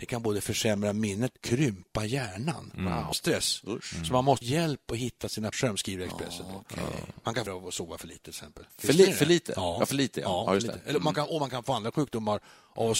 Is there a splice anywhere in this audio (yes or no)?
yes